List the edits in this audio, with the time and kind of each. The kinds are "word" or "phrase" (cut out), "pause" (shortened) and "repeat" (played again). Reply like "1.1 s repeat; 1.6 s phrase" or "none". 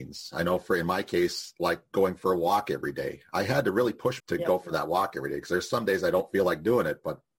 4.2 s phrase